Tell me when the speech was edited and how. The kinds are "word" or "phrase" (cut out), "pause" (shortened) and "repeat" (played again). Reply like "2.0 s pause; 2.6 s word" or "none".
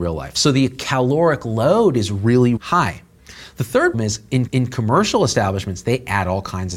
2.6 s word; 3.9 s word; 4.5 s repeat